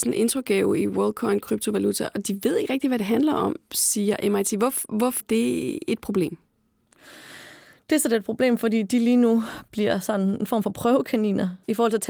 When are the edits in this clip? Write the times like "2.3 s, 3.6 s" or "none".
5.2 s

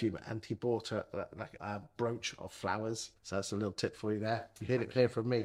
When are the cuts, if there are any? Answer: 1.6 s, 3.2 s

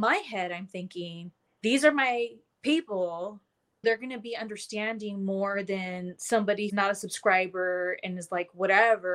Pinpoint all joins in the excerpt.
1.5 s, 3.8 s, 6.7 s

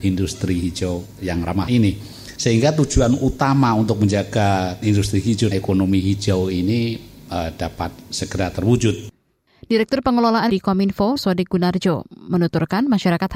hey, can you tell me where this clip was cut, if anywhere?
1.2 s, 1.7 s, 4.8 s, 5.5 s, 10.5 s, 11.2 s

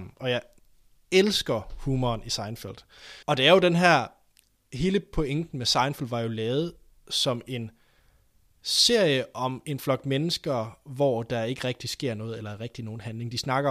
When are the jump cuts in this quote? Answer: 3.2 s

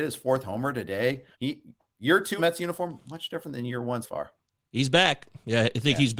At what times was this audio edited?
1.3 s, 2.4 s, 4.0 s

